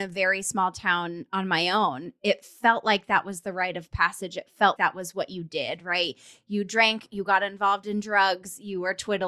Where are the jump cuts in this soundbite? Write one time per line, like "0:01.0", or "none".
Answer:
0:04.8